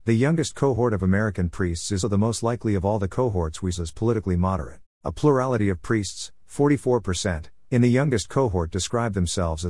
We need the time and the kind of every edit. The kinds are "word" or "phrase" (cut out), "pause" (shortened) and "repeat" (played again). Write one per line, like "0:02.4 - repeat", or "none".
0:02.0 - word
0:03.7 - phrase
0:04.9 - pause